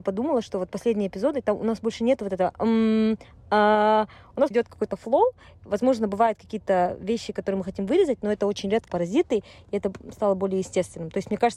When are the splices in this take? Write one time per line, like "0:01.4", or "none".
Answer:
0:04.5
0:08.9